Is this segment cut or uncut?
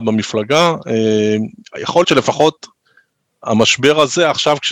cut